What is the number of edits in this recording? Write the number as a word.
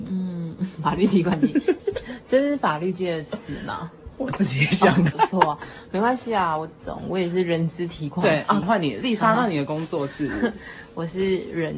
three